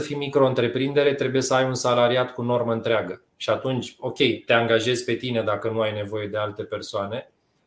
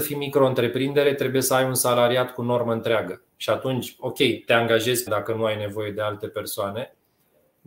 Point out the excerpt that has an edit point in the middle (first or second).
second